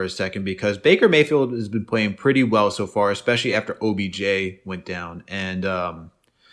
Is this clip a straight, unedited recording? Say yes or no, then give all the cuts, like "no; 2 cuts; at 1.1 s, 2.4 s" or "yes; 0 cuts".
yes; 0 cuts